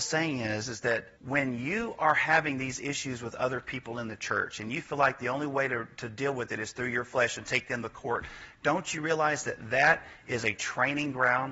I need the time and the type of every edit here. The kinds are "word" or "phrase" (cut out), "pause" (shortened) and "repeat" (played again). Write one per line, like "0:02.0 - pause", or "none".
0:01.2 - pause